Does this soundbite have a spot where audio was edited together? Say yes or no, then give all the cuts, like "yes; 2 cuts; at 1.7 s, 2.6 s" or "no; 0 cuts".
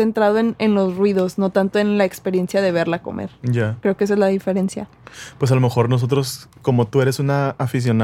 no; 0 cuts